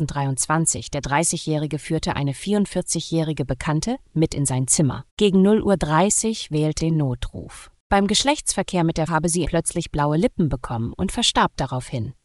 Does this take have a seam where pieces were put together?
yes; 4 cuts; at 5.1 s, 6.8 s, 9.1 s, 9.4 s

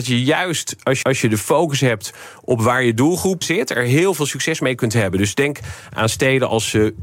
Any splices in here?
yes; 2 cuts; at 1.0 s, 3.4 s

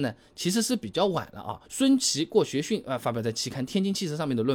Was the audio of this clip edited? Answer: yes; 1 cut; at 1.7 s

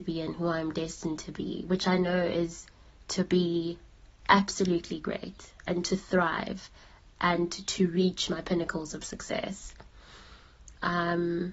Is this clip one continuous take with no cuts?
yes; 0 cuts

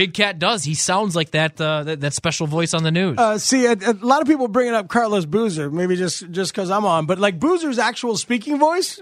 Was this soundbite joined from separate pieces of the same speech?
no; 0 cuts

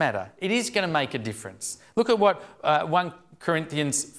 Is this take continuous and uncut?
yes; 0 cuts

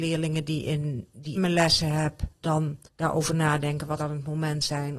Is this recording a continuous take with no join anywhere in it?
no; 4 cuts; at 1.4 s, 2.4 s, 2.8 s, 4.0 s

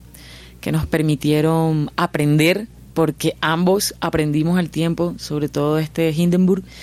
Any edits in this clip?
no; 0 cuts

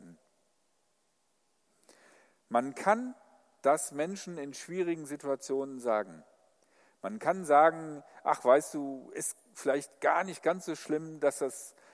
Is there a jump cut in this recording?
no; 0 cuts

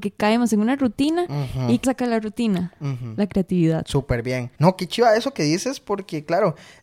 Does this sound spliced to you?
yes; 2 cuts; at 1.8 s, 4.6 s

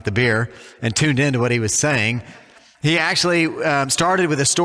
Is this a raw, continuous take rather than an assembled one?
yes; 0 cuts

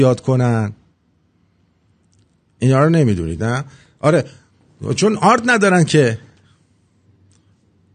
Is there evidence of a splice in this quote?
no; 0 cuts

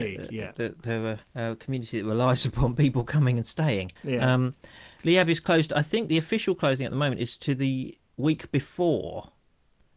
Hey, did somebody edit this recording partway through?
yes; 3 cuts; at 1.3 s, 4.0 s, 8.0 s

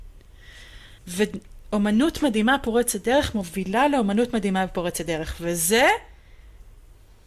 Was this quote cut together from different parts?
yes; 1 cut; at 1.0 s

